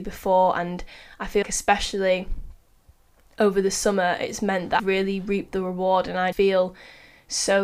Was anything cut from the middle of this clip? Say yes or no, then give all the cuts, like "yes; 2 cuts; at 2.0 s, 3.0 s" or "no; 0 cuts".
yes; 3 cuts; at 1.4 s, 4.8 s, 6.3 s